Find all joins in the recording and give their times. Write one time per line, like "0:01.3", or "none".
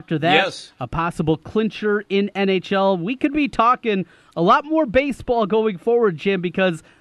none